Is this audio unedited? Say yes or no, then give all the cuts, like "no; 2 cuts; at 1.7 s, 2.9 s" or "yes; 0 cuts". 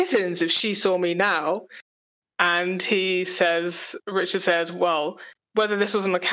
yes; 0 cuts